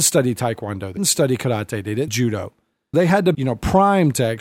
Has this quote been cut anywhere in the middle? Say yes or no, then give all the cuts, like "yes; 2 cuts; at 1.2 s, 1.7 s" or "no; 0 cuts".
yes; 4 cuts; at 1.0 s, 2.1 s, 2.9 s, 3.3 s